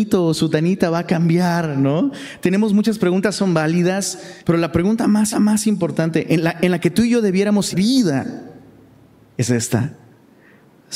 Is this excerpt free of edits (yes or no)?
no